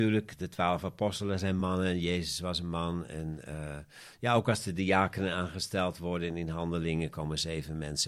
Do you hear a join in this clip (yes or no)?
no